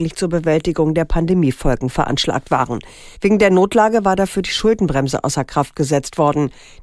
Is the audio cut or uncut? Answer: cut